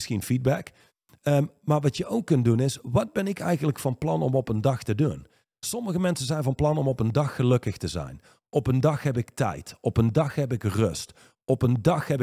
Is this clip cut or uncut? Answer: uncut